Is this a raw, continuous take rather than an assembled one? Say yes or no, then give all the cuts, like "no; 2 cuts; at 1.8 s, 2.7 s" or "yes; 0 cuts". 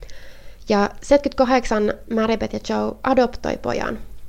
yes; 0 cuts